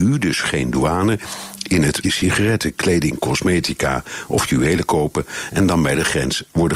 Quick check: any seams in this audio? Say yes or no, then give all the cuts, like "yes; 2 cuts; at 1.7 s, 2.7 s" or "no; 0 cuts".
yes; 1 cut; at 2.0 s